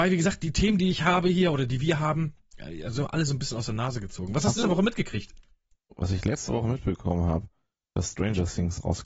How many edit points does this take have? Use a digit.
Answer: 1